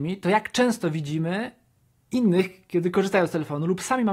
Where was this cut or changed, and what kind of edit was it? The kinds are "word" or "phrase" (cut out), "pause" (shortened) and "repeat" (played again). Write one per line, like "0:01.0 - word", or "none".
none